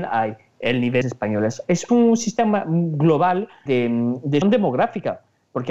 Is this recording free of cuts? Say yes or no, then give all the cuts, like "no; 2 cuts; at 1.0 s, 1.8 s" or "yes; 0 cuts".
no; 4 cuts; at 1.0 s, 1.9 s, 3.7 s, 4.4 s